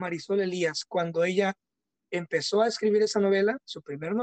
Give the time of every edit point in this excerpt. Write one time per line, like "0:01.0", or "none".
none